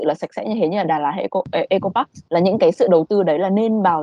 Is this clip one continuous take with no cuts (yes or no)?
no